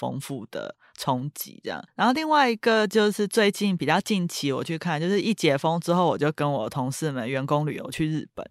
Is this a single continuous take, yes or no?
yes